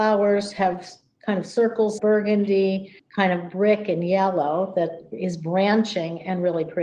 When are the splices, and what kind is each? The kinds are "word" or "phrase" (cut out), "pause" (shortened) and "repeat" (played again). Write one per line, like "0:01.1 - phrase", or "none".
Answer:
0:02.0 - word